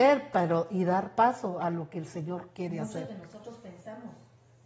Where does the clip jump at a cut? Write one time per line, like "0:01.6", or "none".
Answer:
none